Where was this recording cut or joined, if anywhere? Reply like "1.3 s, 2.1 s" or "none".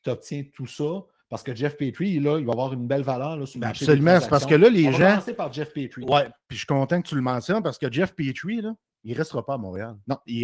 none